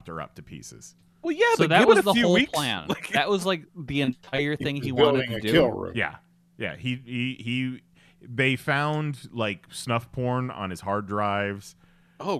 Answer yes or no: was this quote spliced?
no